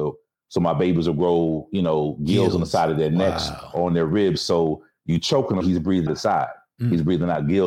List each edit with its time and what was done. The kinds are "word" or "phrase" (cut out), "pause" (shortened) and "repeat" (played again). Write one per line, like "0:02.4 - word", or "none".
0:05.6 - word
0:06.1 - word

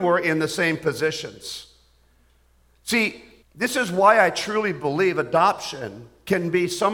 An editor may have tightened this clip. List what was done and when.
0:03.4 - pause

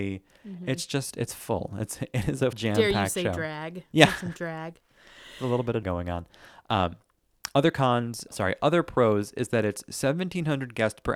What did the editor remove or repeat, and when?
0:02.5 - word
0:05.8 - word
0:08.3 - word

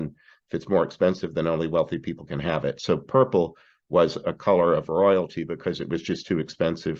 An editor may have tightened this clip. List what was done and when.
none

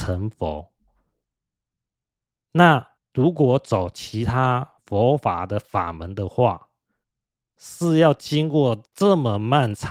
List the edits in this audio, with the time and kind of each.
0:03.0 - pause
0:04.8 - pause

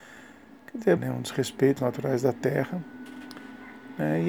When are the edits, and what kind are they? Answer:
0:01.0 - word
0:01.8 - word

